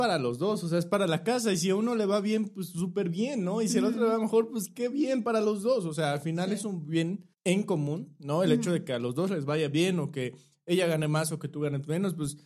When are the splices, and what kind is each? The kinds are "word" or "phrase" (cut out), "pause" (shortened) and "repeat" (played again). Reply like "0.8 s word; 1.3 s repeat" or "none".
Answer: 7.3 s pause